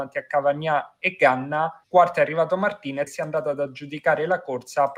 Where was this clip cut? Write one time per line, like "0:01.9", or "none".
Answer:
0:01.8
0:03.1